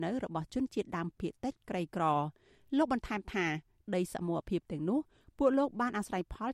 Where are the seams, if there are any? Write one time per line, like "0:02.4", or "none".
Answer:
none